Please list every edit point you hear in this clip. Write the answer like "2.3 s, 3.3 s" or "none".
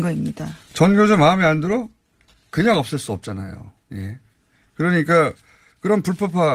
none